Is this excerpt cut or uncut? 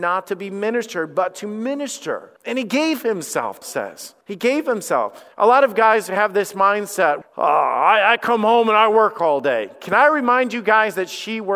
cut